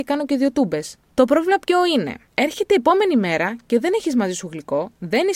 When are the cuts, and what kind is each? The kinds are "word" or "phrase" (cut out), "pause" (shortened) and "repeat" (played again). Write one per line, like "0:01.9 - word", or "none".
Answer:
0:01.1 - pause
0:02.3 - pause